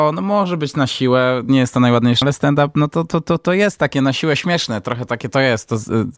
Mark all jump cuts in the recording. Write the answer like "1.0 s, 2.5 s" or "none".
2.2 s